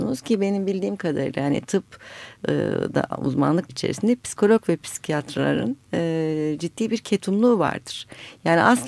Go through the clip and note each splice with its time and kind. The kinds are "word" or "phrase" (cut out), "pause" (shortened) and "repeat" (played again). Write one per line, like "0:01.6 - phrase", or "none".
0:03.7 - word